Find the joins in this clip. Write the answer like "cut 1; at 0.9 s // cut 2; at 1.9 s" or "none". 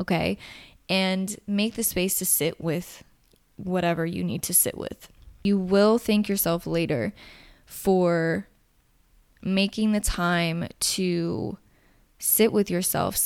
none

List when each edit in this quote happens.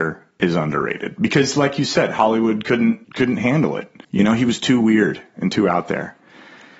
cut 1; at 3.0 s // cut 2; at 4.0 s

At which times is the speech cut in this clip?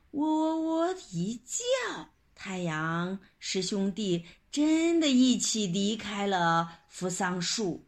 cut 1; at 2.1 s

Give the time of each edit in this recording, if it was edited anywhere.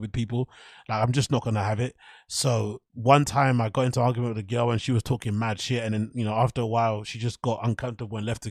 none

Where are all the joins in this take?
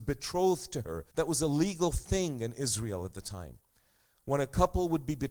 cut 1; at 1.1 s

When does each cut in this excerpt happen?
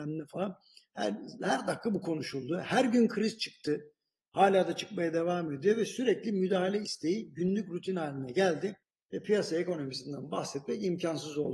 cut 1; at 8.8 s

